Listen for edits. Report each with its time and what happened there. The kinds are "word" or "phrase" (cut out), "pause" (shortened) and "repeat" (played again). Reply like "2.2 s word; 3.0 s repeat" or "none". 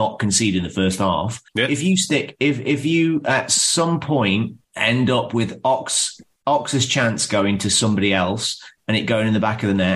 1.5 s pause; 4.6 s pause